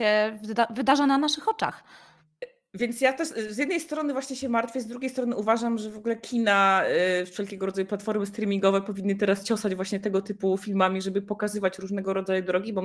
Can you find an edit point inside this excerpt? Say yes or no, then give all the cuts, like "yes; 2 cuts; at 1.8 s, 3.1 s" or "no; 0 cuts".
no; 0 cuts